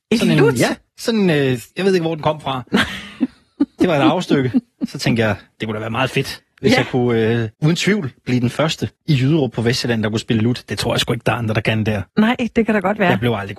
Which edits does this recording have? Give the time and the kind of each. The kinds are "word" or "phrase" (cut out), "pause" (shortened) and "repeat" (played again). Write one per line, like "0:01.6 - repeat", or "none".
0:01.7 - pause
0:07.5 - pause
0:09.0 - pause
0:12.1 - pause